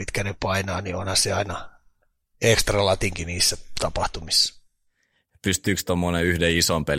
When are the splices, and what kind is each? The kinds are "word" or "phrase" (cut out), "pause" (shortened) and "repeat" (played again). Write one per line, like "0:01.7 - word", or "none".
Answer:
none